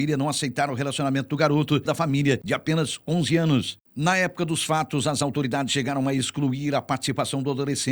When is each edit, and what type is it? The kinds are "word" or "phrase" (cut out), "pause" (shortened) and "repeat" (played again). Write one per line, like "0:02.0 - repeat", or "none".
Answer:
0:01.9 - phrase